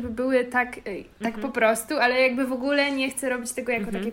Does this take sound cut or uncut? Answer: cut